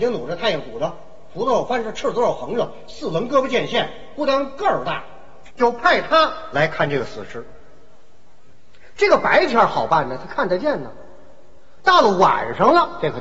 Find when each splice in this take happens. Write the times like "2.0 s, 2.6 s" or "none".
5.5 s